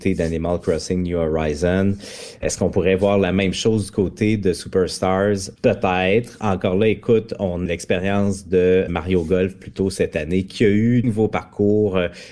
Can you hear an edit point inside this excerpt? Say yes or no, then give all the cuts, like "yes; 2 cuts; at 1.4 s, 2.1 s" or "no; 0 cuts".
yes; 4 cuts; at 5.6 s, 7.7 s, 8.9 s, 11.0 s